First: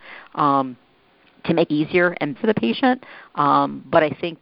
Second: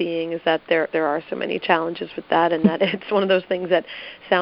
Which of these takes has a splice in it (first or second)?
first